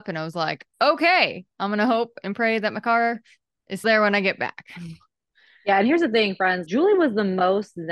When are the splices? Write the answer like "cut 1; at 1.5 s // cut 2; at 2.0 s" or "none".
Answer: cut 1; at 3.8 s // cut 2; at 6.7 s